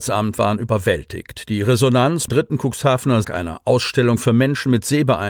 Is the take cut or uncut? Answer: cut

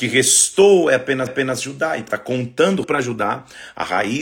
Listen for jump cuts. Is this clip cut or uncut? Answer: cut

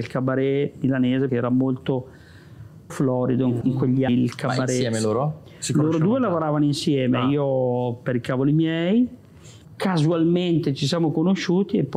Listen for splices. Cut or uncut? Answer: cut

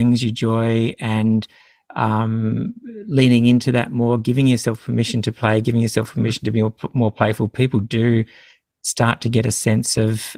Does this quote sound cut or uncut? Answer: uncut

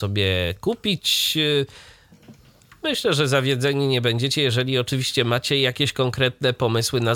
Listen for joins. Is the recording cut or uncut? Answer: uncut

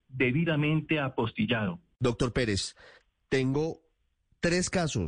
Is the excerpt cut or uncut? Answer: uncut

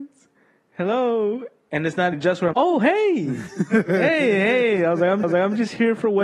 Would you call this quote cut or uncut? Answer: cut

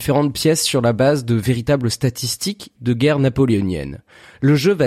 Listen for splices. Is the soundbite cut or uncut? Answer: cut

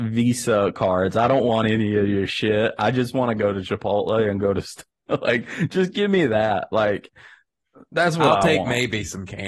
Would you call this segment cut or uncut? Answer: uncut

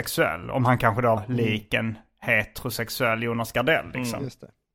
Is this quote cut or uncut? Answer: cut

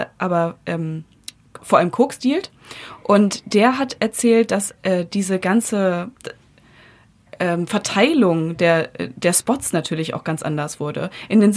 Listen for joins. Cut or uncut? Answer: uncut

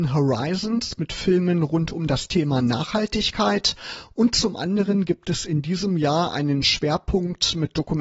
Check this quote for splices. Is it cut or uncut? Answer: uncut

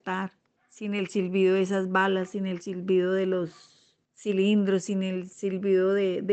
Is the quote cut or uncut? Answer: uncut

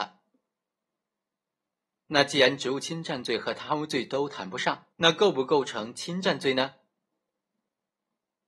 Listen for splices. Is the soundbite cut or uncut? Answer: cut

